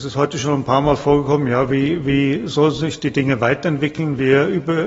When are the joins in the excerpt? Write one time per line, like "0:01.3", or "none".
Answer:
none